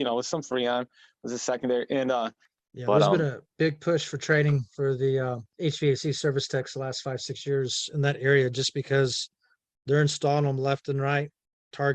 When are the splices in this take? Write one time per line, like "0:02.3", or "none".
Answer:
none